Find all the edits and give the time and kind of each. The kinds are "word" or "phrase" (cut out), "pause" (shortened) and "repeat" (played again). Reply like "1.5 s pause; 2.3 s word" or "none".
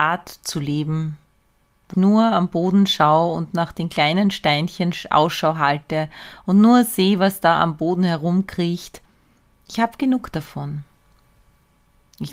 1.9 s word

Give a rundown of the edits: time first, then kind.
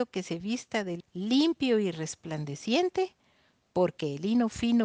1.0 s phrase

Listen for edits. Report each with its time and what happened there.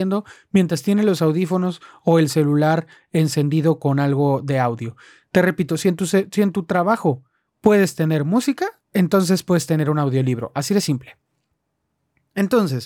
8.8 s pause

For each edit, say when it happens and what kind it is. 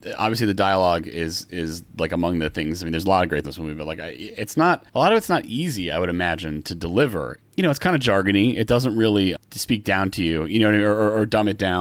3.4 s word; 4.9 s pause

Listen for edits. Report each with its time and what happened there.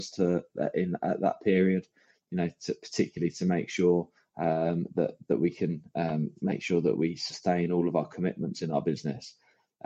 none

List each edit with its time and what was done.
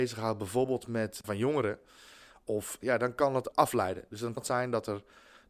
1.2 s word; 2.8 s word; 3.5 s word; 4.4 s word

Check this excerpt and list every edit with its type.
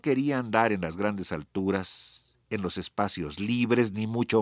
2.4 s pause

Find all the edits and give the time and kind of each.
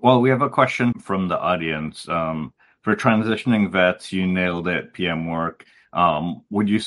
0.9 s word

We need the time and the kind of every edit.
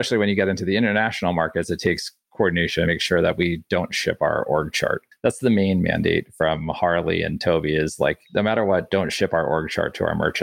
2.9 s phrase; 8.2 s pause

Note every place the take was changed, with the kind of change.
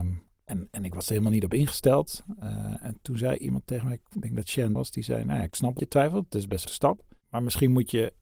4.7 s word; 5.8 s word; 6.6 s word

